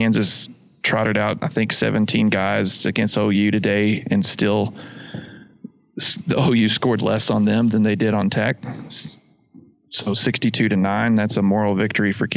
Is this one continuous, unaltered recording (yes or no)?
yes